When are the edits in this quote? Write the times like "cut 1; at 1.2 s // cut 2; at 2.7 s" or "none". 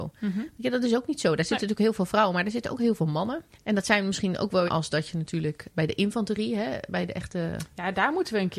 cut 1; at 3.5 s // cut 2; at 4.7 s // cut 3; at 5.7 s